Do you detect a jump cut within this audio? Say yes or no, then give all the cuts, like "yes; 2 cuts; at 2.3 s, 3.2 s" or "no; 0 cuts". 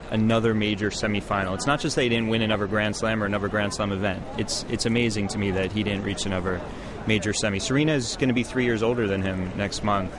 no; 0 cuts